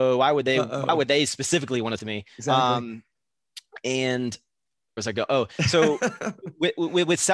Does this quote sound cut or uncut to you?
cut